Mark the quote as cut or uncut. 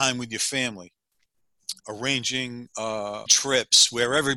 cut